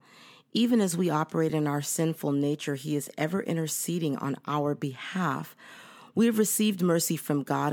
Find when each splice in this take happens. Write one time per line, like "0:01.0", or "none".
none